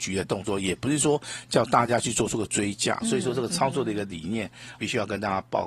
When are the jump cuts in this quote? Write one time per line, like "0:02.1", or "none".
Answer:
0:03.0
0:04.8